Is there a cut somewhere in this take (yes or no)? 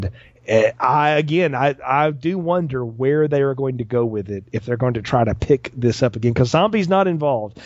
no